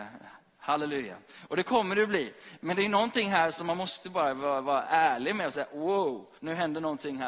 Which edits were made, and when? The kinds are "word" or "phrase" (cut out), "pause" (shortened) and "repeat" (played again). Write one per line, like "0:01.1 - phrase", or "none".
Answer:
0:06.4 - pause